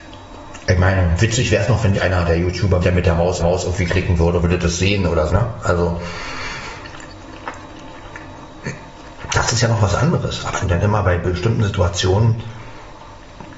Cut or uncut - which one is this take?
cut